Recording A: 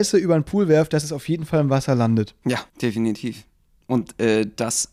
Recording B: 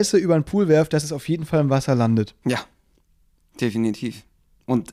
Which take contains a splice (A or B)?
A